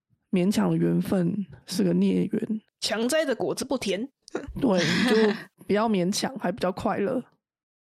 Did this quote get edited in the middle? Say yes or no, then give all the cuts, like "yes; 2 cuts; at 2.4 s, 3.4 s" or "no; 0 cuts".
yes; 4 cuts; at 1.6 s, 2.7 s, 4.1 s, 5.5 s